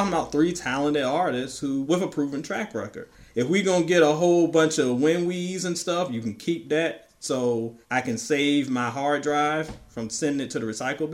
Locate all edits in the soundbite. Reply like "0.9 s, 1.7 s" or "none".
1.8 s, 7.8 s